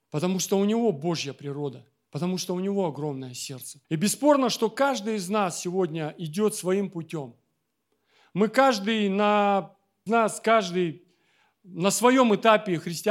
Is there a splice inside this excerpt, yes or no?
yes